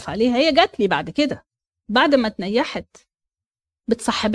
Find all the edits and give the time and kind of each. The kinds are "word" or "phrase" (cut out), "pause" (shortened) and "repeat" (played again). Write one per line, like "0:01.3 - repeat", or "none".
none